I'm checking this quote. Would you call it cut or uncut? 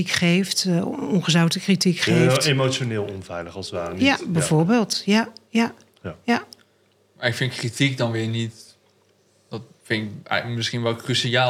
uncut